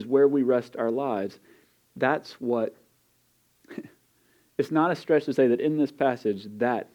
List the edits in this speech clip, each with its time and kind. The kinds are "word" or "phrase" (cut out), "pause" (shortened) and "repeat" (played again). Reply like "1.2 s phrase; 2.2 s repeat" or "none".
none